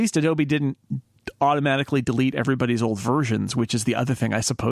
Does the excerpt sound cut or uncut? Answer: uncut